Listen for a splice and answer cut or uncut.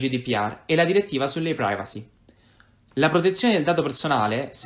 uncut